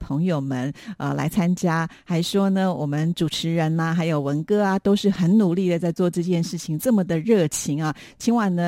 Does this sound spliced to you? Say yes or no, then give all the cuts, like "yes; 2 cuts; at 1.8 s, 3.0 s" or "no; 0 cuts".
no; 0 cuts